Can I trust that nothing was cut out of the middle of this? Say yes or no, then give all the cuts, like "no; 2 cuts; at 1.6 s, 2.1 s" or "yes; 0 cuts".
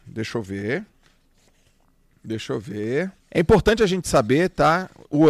no; 1 cut; at 3.2 s